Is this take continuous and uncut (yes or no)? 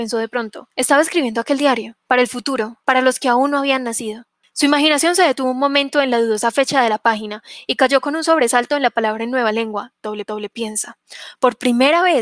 no